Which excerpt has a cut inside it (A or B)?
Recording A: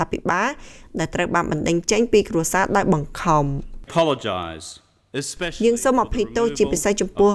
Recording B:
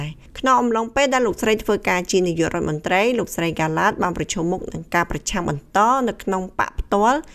A